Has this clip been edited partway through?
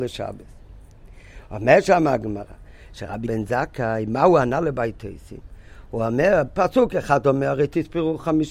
yes; 1 cut; at 3.3 s

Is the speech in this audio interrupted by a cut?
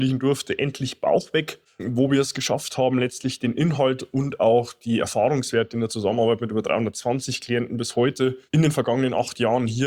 yes; 2 cuts; at 1.7 s, 8.5 s

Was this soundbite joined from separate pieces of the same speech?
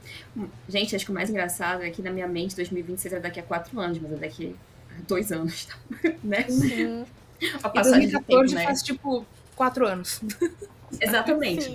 no; 0 cuts

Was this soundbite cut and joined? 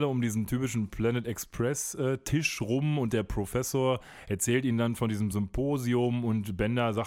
no; 0 cuts

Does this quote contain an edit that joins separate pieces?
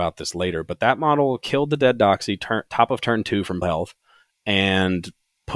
yes; 1 cut; at 3.6 s

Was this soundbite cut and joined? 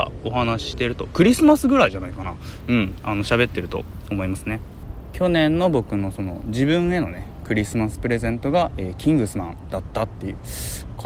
no; 0 cuts

